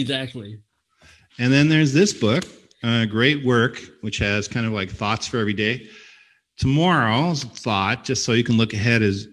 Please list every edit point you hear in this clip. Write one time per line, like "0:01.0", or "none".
none